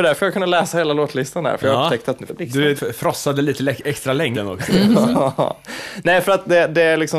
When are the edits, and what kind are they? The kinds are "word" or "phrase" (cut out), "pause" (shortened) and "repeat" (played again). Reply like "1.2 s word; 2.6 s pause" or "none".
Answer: 2.3 s word; 2.8 s phrase; 4.3 s word